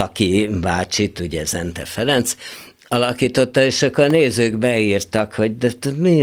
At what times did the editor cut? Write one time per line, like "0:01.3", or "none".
none